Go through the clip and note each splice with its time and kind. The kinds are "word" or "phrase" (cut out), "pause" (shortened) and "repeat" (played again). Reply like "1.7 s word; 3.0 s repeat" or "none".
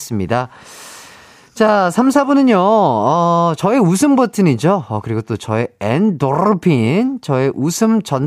3.6 s word